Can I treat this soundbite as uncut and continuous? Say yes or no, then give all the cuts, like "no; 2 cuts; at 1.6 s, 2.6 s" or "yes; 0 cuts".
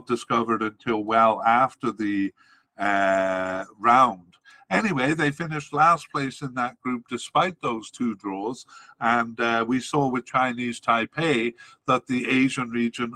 yes; 0 cuts